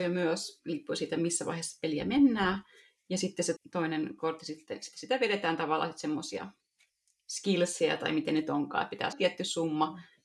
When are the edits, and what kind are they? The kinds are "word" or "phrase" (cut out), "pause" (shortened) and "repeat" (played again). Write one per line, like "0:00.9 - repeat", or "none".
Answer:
0:03.6 - word
0:09.1 - word